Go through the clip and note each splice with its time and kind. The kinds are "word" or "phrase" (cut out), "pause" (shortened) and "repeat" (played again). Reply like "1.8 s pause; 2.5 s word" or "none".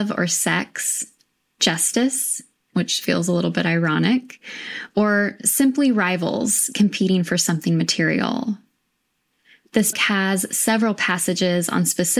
9.9 s word